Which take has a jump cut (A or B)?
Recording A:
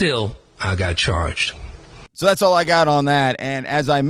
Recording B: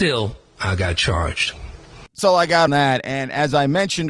B